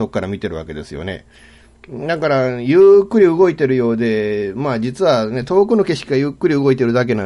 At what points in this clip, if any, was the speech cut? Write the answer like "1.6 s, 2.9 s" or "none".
none